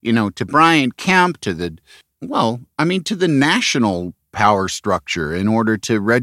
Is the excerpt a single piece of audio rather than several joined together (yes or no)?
yes